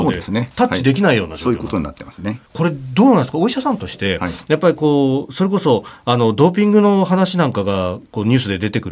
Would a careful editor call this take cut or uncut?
cut